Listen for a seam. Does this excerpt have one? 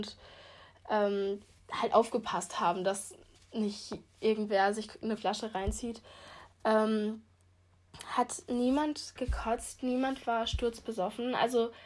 yes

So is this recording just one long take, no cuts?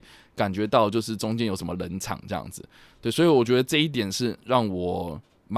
yes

